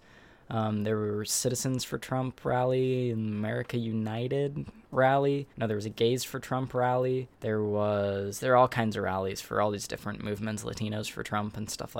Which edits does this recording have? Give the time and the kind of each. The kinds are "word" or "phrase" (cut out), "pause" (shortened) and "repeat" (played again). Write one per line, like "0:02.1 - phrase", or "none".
0:05.5 - pause
0:07.3 - pause

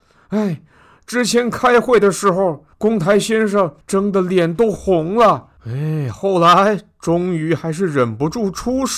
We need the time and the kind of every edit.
0:02.7 - pause
0:03.8 - pause
0:05.6 - pause

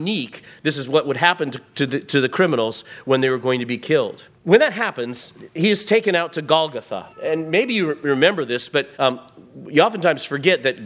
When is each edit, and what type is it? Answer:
0:04.4 - pause
0:07.1 - pause
0:08.9 - pause

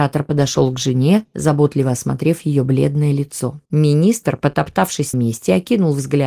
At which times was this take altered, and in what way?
0:01.3 - pause
0:03.6 - pause
0:05.1 - word

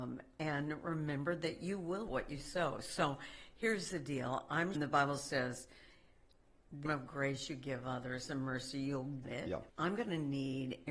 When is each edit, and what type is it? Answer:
0:02.1 - word
0:04.7 - phrase
0:06.9 - word
0:09.2 - word
0:09.7 - pause

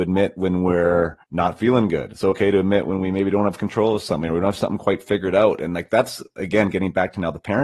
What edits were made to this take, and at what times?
0:01.2 - pause

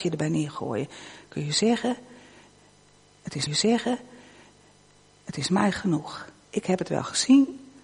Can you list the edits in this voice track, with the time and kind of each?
0:03.5 - repeat
0:06.4 - pause

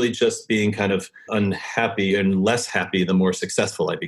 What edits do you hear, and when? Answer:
0:01.3 - word

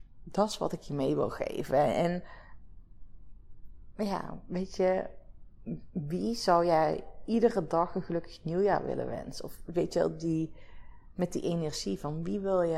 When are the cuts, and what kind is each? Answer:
none

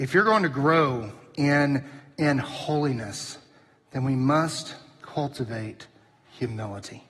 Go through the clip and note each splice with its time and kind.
none

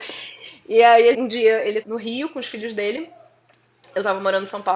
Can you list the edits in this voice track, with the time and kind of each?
0:01.1 - word
0:01.8 - word

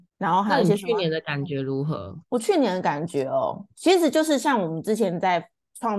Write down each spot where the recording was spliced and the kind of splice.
0:02.2 - pause

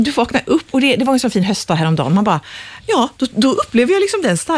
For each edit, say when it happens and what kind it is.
none

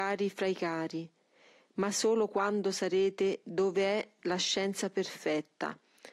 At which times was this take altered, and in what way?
none

